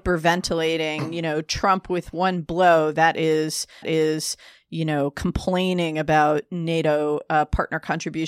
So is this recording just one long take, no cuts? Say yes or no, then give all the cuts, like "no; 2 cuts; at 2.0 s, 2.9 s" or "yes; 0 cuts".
no; 1 cut; at 3.8 s